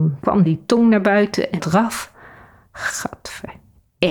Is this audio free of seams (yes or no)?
no